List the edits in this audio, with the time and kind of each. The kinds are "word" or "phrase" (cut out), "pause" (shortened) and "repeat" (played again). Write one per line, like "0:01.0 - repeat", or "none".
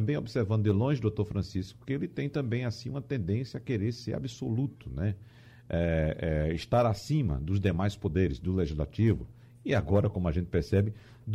none